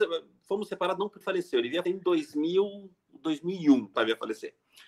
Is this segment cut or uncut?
cut